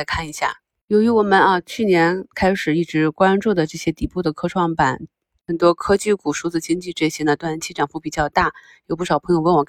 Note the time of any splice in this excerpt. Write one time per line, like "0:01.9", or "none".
none